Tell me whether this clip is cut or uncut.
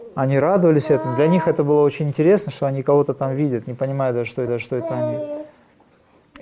cut